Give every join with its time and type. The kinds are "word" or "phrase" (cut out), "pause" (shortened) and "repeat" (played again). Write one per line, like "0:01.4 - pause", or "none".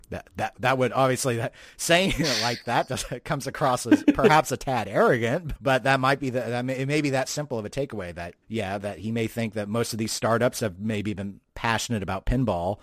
0:05.5 - word
0:08.4 - pause